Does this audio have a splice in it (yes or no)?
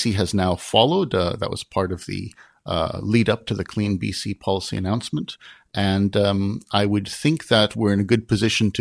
no